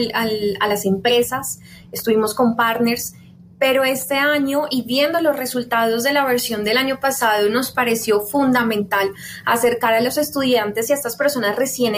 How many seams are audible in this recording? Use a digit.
0